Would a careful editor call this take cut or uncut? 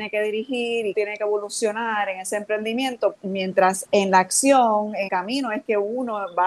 cut